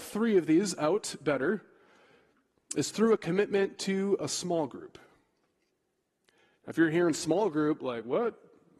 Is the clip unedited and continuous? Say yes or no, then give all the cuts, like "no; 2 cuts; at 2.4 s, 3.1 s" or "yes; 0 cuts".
yes; 0 cuts